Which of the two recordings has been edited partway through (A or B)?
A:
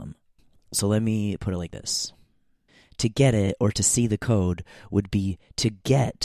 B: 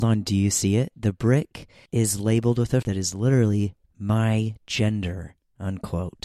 B